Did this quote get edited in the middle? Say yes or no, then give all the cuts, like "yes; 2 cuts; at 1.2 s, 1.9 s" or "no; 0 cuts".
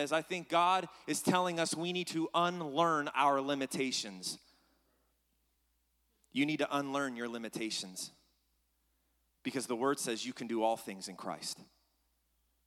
no; 0 cuts